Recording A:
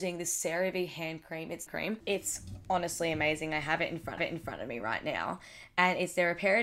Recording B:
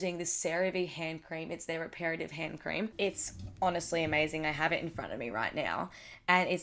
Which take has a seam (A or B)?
A